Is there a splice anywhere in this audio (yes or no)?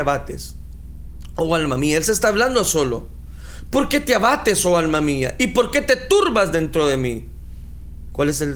no